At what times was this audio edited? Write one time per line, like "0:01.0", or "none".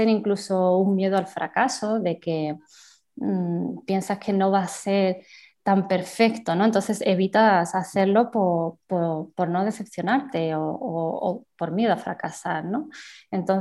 none